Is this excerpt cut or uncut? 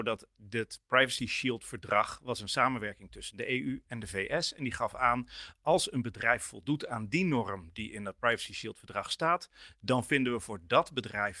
uncut